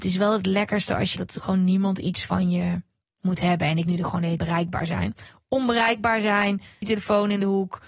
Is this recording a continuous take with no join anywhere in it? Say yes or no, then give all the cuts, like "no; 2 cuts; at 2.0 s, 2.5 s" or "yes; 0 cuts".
no; 4 cuts; at 1.2 s, 3.8 s, 4.4 s, 6.8 s